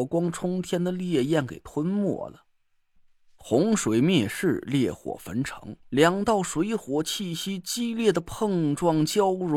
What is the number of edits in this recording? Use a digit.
1